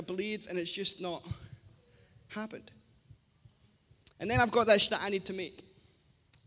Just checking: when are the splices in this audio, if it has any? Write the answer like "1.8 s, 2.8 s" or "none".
4.1 s, 4.9 s